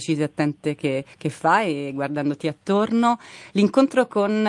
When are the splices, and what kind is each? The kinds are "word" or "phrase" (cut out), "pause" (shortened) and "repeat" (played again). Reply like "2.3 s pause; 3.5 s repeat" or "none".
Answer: 1.1 s pause